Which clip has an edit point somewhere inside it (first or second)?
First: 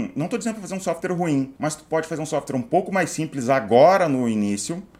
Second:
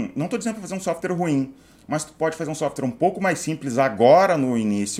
first